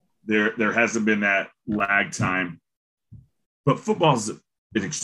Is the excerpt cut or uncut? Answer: uncut